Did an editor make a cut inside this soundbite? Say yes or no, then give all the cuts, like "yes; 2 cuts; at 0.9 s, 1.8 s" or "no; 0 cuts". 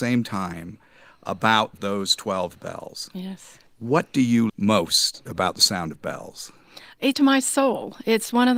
yes; 4 cuts; at 1.7 s, 3.7 s, 4.5 s, 7.1 s